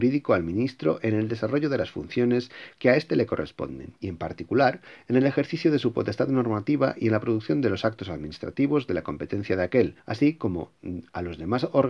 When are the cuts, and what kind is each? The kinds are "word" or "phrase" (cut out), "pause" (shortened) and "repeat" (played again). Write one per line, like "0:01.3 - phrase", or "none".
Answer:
0:04.0 - pause
0:10.0 - pause